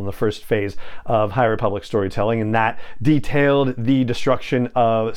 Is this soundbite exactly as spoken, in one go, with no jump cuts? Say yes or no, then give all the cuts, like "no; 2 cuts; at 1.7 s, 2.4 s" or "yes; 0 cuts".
yes; 0 cuts